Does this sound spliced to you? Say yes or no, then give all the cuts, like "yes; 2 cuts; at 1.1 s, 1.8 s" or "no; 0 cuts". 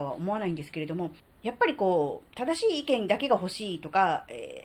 yes; 2 cuts; at 1.2 s, 2.3 s